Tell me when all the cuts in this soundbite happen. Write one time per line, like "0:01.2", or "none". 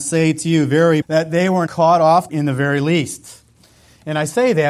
0:01.0
0:01.7
0:02.3

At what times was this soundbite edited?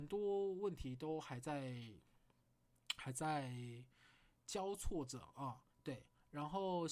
0:05.7

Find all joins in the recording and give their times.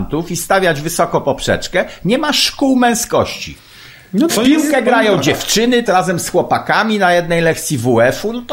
0:04.3
0:05.9

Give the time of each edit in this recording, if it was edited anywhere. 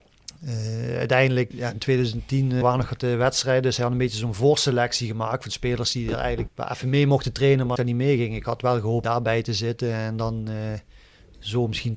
0:01.5
0:02.6
0:07.8
0:09.0

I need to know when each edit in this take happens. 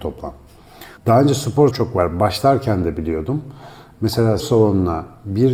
0:01.0
0:01.7
0:04.4

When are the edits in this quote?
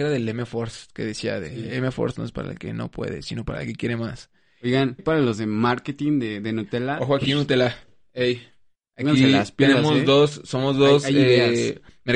0:05.0

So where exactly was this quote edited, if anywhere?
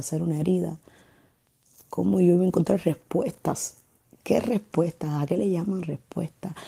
0:04.0

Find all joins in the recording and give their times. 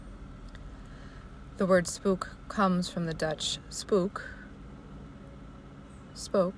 none

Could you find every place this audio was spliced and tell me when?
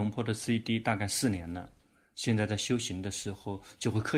none

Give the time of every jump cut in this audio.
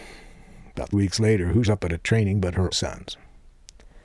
0:00.9
0:01.6
0:02.7

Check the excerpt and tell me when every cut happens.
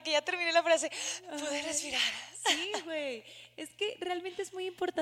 none

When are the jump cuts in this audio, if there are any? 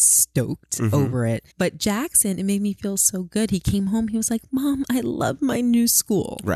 0:01.5

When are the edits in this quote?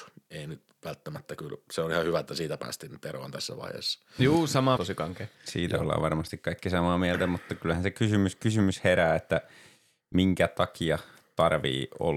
0:04.8

